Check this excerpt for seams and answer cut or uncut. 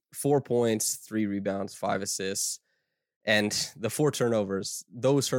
uncut